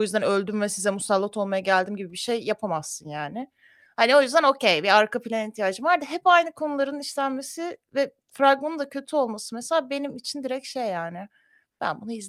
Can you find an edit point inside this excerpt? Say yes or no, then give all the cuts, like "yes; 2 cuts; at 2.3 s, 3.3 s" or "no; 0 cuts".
no; 0 cuts